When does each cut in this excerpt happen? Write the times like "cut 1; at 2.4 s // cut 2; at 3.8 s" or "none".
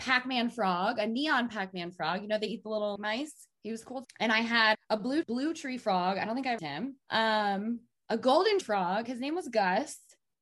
cut 1; at 3.0 s // cut 2; at 4.0 s // cut 3; at 4.7 s // cut 4; at 5.2 s // cut 5; at 6.6 s // cut 6; at 7.0 s // cut 7; at 8.6 s